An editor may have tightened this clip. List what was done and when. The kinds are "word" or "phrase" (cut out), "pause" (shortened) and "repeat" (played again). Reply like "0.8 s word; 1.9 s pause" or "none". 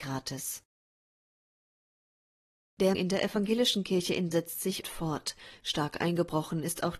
2.9 s word; 4.3 s word; 4.8 s word